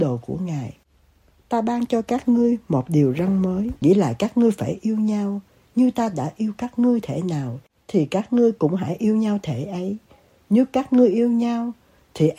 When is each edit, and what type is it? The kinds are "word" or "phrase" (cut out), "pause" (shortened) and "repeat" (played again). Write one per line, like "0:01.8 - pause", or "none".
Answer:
none